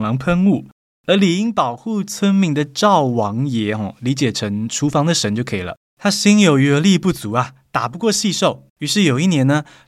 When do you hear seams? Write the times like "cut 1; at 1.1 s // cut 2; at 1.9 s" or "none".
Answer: cut 1; at 5.8 s // cut 2; at 8.7 s